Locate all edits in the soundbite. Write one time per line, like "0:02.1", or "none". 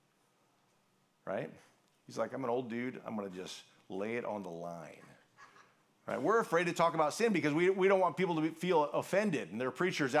none